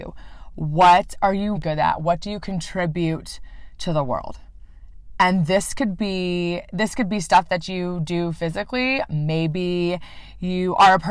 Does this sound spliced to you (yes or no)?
yes